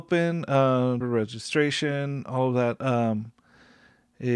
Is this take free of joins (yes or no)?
no